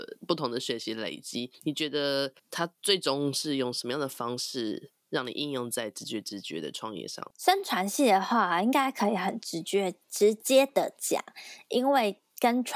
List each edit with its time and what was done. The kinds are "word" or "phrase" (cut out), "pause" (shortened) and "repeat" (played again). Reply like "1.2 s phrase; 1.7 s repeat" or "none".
2.4 s pause; 7.3 s pause